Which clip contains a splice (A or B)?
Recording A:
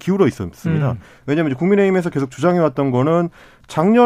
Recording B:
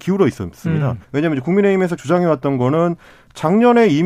B